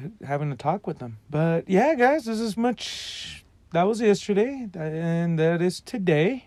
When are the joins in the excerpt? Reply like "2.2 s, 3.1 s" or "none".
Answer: 1.2 s, 2.6 s